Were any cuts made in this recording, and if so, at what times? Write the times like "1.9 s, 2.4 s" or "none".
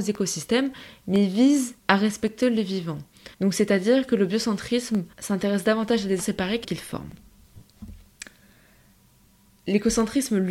1.8 s, 3.3 s, 5.1 s, 6.2 s, 6.6 s